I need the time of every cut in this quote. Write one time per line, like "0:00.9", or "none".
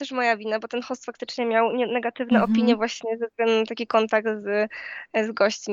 none